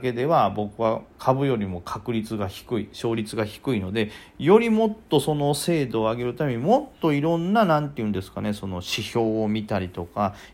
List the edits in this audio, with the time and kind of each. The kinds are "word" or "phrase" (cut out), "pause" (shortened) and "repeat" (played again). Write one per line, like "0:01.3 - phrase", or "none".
0:01.1 - pause